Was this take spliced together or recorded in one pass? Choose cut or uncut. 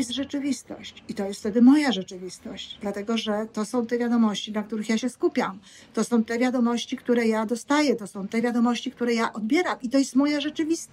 uncut